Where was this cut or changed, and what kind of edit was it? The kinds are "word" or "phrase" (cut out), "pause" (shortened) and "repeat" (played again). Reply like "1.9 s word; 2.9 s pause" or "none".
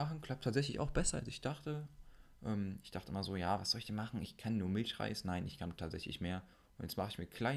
6.5 s pause